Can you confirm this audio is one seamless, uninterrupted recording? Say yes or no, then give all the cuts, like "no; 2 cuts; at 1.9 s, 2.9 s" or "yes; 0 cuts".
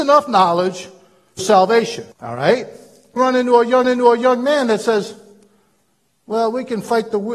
no; 4 cuts; at 1.4 s, 2.1 s, 3.2 s, 3.8 s